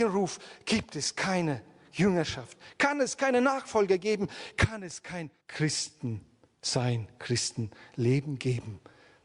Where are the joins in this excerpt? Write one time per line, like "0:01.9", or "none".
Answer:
0:05.4